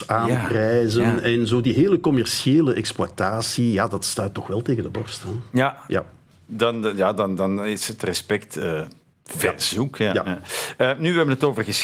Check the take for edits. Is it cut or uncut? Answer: uncut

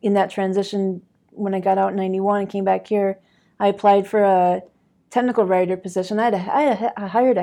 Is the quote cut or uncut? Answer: uncut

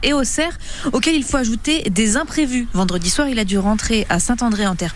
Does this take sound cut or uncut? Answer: uncut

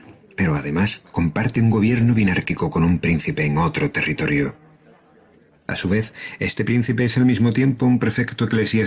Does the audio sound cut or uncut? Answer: uncut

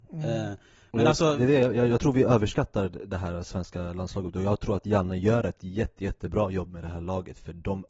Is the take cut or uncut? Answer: uncut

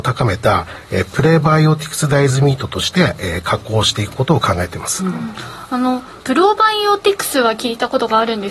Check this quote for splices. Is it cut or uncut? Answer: cut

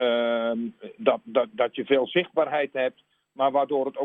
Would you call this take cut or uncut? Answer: uncut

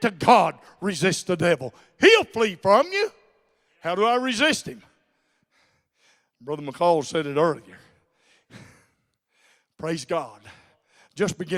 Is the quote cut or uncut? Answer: uncut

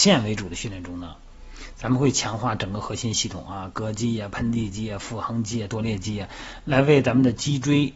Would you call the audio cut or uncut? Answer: uncut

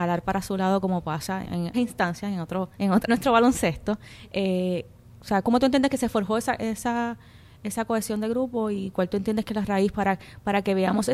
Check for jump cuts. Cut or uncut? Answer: cut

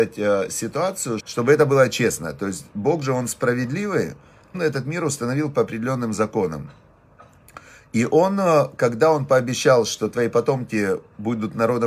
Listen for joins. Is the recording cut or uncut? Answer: cut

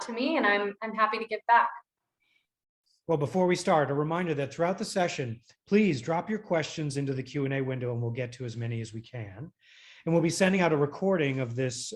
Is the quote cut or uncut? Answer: uncut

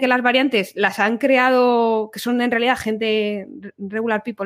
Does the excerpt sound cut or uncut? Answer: uncut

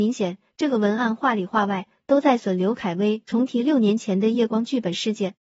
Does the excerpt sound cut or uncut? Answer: uncut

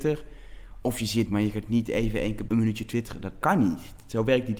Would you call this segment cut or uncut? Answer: cut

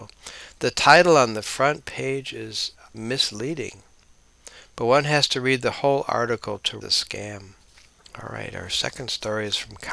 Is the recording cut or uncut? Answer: cut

